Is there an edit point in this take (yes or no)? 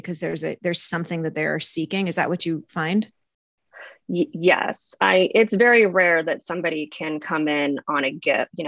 no